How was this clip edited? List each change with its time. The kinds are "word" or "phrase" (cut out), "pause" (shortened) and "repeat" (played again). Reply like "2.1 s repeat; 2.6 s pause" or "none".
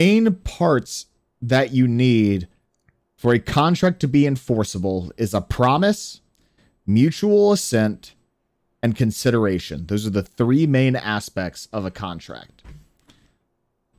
none